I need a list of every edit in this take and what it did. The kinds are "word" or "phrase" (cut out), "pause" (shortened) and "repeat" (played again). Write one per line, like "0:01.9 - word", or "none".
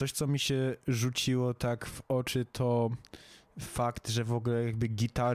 none